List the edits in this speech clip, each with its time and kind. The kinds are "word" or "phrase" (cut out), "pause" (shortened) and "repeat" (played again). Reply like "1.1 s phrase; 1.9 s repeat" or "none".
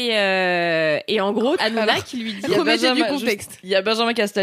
1.6 s word